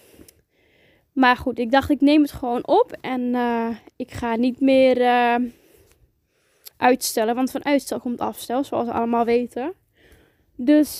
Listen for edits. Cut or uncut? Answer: cut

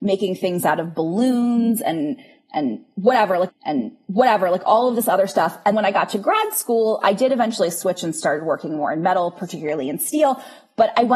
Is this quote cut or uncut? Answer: cut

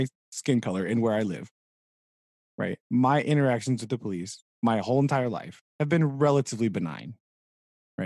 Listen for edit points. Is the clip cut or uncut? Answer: cut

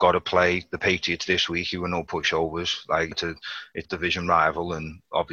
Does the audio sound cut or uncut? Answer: cut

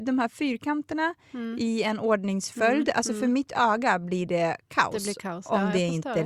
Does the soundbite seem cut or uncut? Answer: uncut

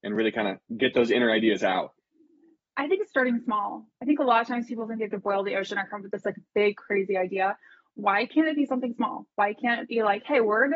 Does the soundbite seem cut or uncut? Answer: uncut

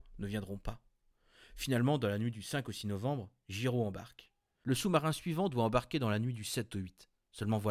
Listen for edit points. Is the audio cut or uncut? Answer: uncut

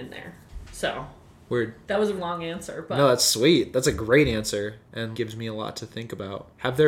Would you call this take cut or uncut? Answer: cut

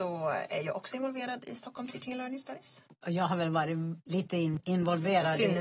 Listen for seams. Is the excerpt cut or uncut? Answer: uncut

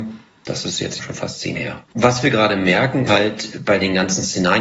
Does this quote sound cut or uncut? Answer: cut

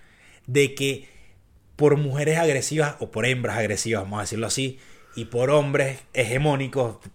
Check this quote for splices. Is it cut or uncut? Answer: uncut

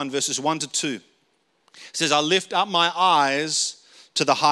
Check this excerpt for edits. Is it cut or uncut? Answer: uncut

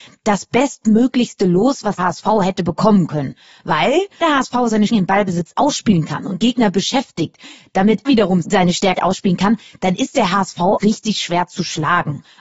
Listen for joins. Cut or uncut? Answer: cut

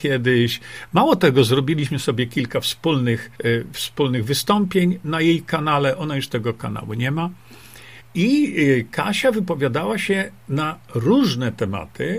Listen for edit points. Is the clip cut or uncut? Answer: cut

